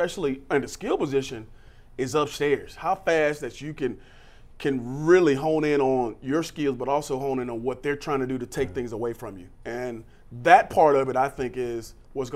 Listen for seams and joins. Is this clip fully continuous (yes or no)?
yes